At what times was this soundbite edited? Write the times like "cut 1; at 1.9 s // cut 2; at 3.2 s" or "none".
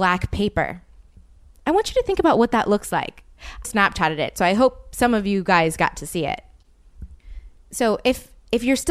cut 1; at 3.6 s